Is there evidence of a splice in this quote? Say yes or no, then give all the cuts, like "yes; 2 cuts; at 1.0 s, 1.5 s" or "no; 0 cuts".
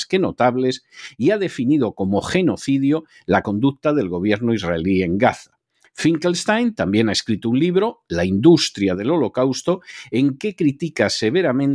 no; 0 cuts